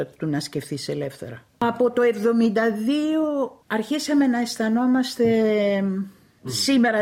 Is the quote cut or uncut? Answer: uncut